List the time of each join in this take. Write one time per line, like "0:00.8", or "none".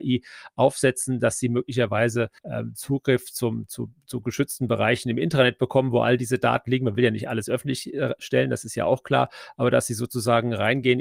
0:02.4